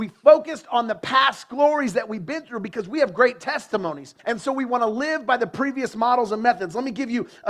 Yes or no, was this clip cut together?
yes